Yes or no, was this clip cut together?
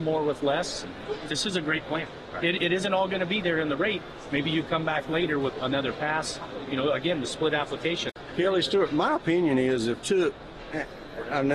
yes